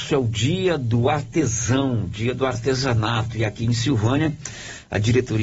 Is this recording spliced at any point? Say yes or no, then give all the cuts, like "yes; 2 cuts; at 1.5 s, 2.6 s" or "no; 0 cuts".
no; 0 cuts